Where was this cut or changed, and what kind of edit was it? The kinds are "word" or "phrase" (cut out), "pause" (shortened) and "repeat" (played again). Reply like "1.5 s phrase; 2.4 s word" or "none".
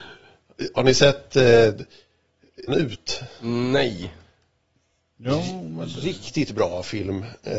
2.7 s word